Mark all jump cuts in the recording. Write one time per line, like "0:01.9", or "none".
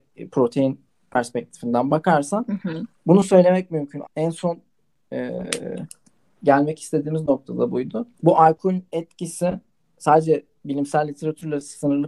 0:02.9
0:04.0
0:08.1